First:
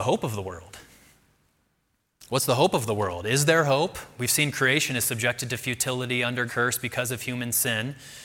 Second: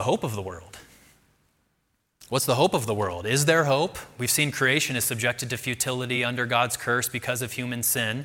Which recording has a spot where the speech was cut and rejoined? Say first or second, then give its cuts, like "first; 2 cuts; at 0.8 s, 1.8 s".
first; 1 cut; at 6.5 s